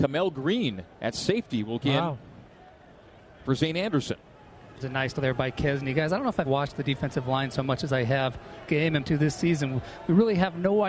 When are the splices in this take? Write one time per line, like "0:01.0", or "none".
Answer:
0:01.8
0:04.8
0:05.1
0:06.5
0:08.7
0:09.0